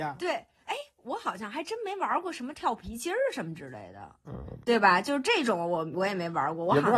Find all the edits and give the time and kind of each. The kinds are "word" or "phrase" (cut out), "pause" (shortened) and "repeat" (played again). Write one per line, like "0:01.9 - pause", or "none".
0:04.6 - pause